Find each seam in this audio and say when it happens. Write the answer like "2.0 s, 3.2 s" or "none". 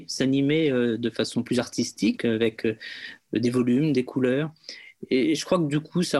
2.2 s